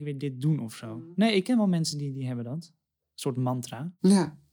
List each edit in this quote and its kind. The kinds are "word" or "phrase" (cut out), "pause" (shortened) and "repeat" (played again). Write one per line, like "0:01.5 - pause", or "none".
none